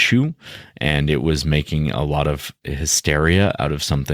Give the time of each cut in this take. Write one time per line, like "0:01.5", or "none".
none